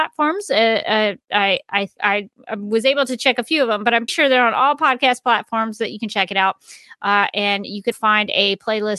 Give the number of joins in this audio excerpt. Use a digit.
3